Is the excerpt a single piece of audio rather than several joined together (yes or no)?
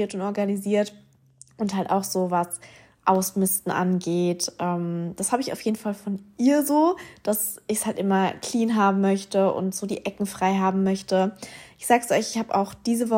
yes